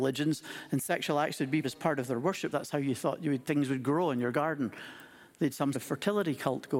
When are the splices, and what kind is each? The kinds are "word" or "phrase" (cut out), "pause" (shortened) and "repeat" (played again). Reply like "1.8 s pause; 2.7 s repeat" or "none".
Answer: 1.6 s word; 2.5 s word; 5.7 s word